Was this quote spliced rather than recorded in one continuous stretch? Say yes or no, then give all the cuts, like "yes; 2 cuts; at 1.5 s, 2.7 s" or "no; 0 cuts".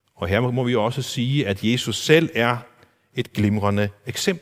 no; 0 cuts